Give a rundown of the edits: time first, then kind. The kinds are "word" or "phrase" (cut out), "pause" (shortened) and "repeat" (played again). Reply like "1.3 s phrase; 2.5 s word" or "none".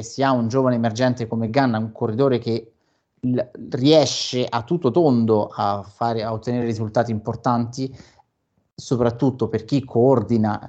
none